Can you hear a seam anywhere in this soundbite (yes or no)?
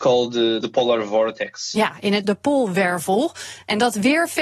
yes